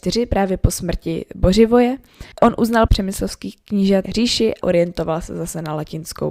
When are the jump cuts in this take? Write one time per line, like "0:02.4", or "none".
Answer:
0:02.3
0:02.9
0:04.0
0:04.6